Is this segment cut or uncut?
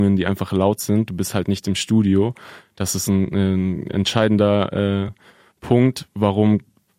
uncut